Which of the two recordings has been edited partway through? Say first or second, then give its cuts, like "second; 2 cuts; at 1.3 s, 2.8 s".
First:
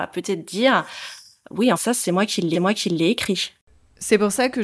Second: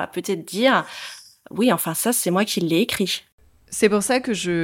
first; 2 cuts; at 1.7 s, 2.5 s